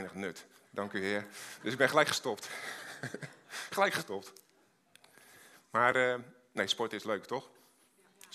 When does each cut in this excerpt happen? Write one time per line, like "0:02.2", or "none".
none